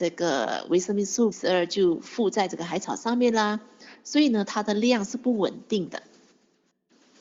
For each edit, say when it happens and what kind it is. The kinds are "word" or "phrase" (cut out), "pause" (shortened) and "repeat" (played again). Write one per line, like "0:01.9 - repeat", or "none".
0:01.3 - word